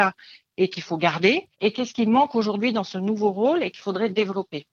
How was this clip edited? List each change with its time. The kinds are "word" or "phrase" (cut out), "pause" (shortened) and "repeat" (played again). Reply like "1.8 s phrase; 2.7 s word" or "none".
1.5 s pause